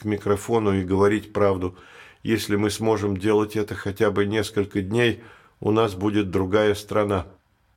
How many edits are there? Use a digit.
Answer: 0